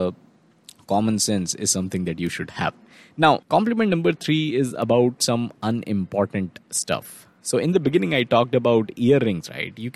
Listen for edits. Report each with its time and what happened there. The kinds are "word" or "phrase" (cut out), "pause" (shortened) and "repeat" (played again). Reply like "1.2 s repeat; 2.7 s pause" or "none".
none